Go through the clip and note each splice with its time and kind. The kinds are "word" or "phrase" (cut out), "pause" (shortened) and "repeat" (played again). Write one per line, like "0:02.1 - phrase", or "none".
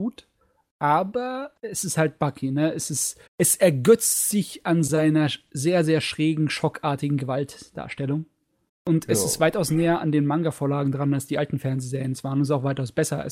0:01.6 - pause
0:03.3 - pause
0:08.7 - pause